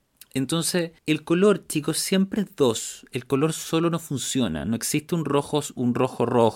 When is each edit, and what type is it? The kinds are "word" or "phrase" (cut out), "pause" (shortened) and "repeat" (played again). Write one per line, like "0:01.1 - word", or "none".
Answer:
0:01.0 - pause